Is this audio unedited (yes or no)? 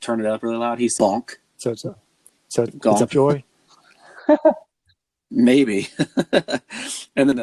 no